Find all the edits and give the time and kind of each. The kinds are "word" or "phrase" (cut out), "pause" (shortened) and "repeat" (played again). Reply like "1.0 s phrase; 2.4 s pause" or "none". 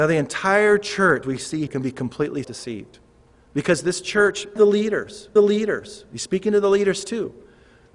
1.2 s word; 1.7 s word; 2.4 s word; 4.6 s word; 5.4 s repeat